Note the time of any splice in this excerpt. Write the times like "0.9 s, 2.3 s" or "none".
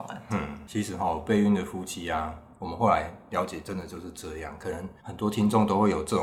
5.0 s